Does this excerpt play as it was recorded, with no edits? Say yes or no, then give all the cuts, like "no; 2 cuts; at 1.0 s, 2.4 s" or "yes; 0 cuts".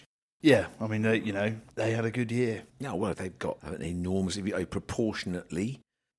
no; 1 cut; at 2.7 s